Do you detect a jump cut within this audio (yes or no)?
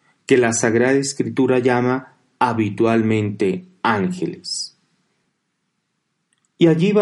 no